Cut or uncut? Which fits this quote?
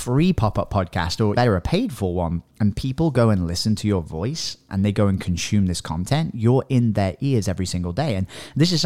cut